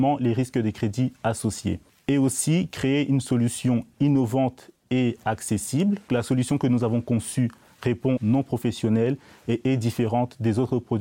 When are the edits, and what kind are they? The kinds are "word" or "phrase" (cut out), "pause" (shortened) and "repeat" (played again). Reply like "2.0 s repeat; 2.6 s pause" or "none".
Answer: 1.9 s pause; 6.1 s word; 8.2 s phrase